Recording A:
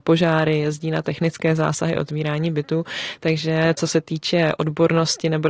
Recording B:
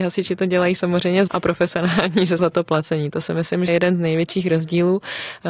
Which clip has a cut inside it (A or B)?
B